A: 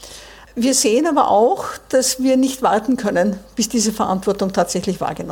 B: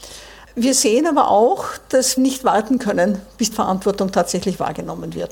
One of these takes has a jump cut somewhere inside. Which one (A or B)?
B